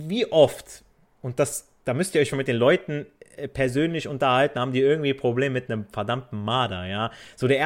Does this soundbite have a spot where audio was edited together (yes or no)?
yes